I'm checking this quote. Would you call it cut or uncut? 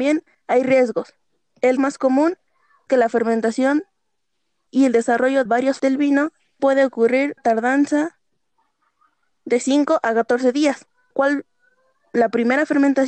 cut